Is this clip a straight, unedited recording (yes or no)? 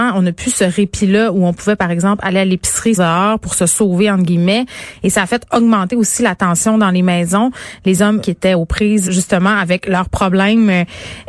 no